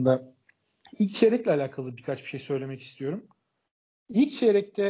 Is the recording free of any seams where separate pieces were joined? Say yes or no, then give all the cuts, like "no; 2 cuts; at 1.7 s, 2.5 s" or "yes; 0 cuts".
yes; 0 cuts